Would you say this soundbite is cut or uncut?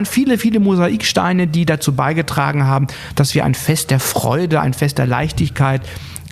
uncut